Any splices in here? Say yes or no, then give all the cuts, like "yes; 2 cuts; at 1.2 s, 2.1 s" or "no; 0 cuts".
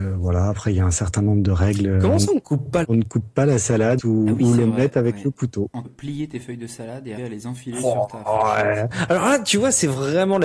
yes; 4 cuts; at 2.8 s, 4.0 s, 5.8 s, 7.2 s